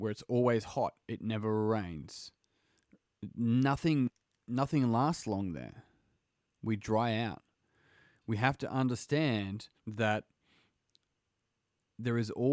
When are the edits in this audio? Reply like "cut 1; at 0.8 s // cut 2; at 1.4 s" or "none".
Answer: cut 1; at 9.8 s